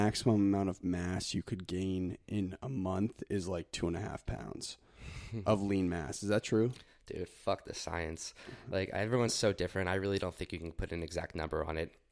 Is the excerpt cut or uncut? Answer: uncut